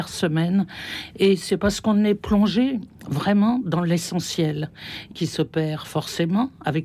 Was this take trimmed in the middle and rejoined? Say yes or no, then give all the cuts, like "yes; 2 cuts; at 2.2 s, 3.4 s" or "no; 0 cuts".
yes; 1 cut; at 5.1 s